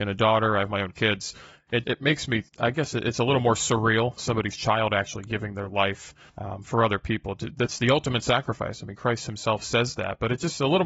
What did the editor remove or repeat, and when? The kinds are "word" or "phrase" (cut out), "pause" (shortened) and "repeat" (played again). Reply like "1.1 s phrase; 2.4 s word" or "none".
1.8 s word; 2.5 s pause; 4.2 s phrase; 6.3 s pause